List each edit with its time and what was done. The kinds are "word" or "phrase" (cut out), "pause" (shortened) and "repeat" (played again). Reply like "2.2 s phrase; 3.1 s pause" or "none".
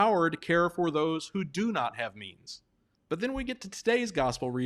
2.9 s pause